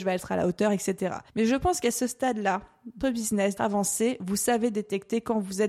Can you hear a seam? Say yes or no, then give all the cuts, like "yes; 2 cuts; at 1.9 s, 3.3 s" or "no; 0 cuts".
yes; 3 cuts; at 1.3 s, 3.0 s, 3.6 s